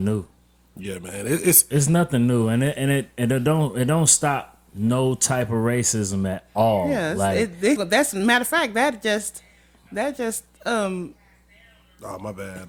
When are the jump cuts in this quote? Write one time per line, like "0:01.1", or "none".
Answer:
0:07.8